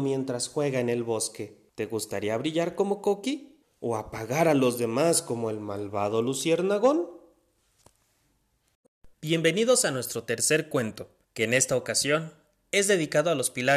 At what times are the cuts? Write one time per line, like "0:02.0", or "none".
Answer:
0:01.7
0:03.6
0:09.1
0:11.2